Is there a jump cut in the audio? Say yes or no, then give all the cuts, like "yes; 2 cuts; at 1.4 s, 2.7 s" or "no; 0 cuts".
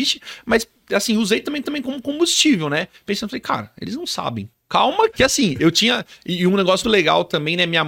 yes; 4 cuts; at 1.6 s, 4.5 s, 5.1 s, 6.8 s